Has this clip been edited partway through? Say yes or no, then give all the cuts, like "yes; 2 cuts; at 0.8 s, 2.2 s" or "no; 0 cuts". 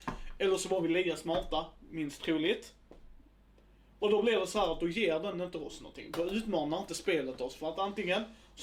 no; 0 cuts